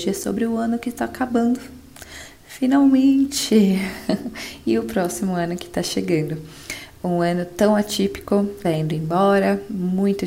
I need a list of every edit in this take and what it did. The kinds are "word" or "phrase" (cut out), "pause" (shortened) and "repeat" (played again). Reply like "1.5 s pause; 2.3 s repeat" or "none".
8.6 s phrase